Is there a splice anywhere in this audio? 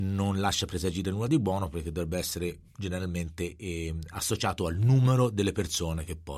no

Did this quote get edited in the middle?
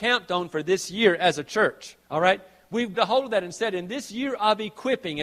yes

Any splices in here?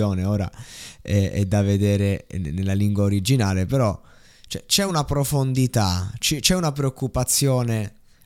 no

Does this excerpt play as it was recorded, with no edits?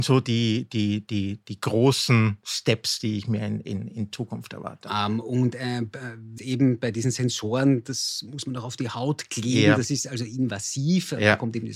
no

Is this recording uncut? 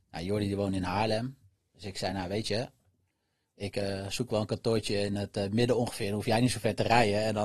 yes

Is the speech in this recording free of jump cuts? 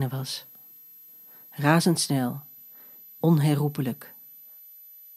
no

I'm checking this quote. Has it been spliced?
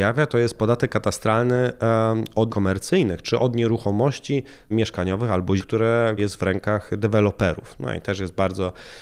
yes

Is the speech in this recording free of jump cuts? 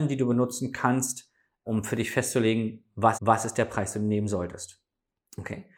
no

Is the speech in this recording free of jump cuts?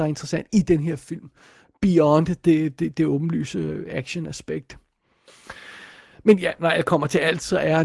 yes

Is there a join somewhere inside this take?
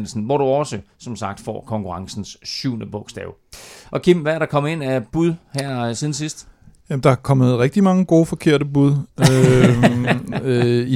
no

